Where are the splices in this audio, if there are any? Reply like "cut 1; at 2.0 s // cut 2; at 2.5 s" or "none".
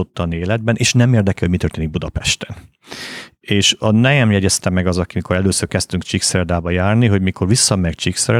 none